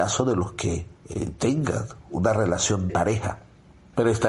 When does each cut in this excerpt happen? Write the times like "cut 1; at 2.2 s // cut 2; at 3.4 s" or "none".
cut 1; at 1.0 s // cut 2; at 2.9 s